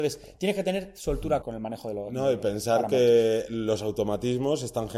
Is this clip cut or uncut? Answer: cut